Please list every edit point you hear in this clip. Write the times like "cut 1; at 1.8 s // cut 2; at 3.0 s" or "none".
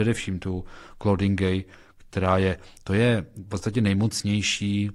none